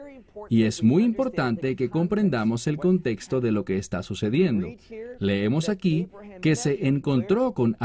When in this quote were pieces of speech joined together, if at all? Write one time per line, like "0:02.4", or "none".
none